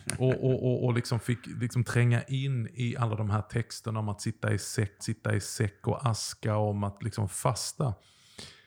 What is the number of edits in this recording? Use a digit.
1